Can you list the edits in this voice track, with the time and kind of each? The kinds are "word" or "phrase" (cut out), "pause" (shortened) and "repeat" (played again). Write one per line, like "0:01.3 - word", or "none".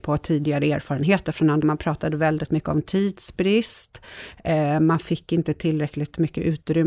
0:01.6 - phrase